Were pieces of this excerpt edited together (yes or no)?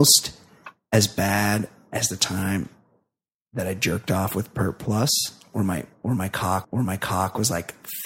yes